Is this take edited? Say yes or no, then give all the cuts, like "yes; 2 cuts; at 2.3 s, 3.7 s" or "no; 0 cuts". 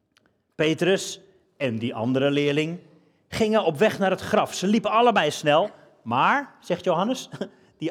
no; 0 cuts